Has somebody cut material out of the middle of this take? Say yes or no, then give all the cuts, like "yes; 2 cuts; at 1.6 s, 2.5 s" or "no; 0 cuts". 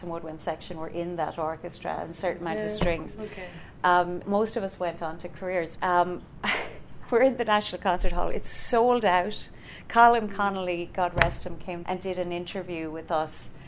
yes; 3 cuts; at 4.2 s, 5.8 s, 11.8 s